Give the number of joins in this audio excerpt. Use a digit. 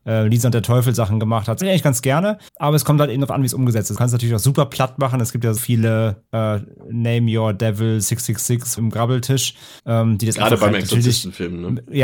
7